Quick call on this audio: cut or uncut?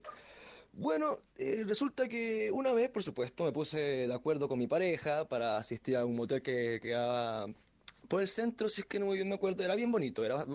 uncut